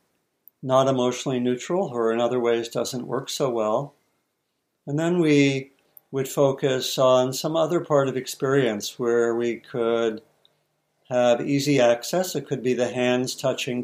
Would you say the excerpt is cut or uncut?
uncut